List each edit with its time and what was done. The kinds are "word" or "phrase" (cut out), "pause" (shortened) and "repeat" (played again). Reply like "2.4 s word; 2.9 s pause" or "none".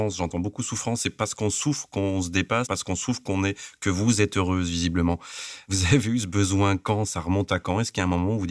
2.7 s word